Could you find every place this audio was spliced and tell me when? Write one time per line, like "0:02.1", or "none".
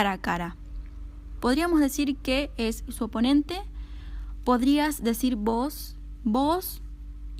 0:02.9